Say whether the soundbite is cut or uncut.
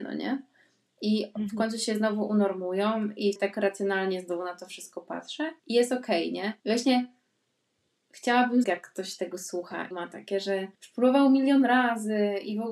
cut